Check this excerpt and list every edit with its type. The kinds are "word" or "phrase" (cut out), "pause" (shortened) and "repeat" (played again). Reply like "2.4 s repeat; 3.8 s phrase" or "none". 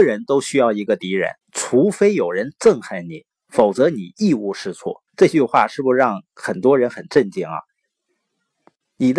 1.4 s pause; 5.1 s pause